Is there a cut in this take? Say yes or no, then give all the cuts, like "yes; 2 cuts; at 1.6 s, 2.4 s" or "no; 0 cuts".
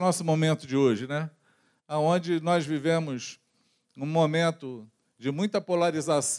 no; 0 cuts